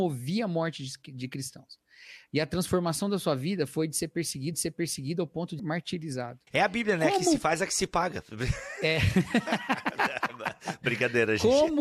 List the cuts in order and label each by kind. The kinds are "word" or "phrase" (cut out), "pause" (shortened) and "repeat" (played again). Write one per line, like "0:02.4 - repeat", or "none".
0:04.5 - repeat
0:05.6 - word
0:06.5 - pause